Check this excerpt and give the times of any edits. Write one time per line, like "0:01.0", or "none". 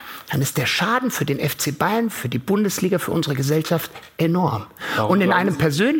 none

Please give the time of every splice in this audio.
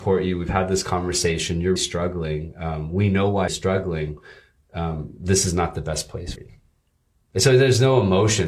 0:01.8
0:03.5
0:06.4

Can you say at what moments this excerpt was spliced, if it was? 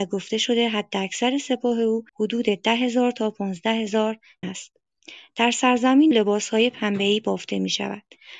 0:02.1
0:04.4
0:06.1

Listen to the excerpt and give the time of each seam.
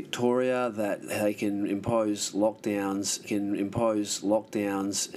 0:03.2

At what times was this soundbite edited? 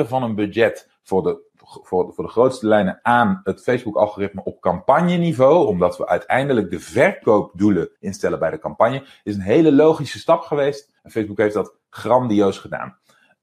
0:08.0
0:11.0

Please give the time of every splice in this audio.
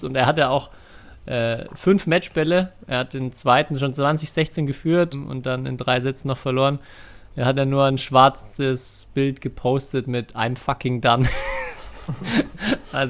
0:05.1

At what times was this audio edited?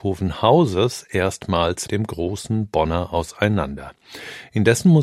0:01.9

